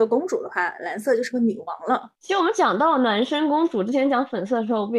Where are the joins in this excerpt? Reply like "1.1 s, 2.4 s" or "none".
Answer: 2.2 s